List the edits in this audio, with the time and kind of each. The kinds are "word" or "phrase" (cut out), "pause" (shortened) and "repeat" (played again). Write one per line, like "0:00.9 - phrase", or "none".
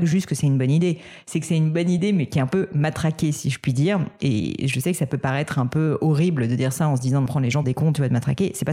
0:07.3 - phrase
0:07.6 - word